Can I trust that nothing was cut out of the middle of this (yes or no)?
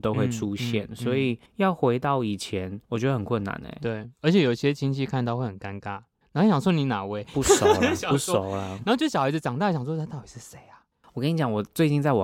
no